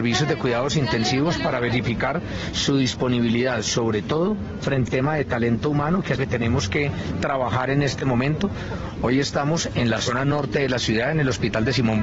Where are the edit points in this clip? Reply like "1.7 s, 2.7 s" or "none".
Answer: 4.9 s, 6.2 s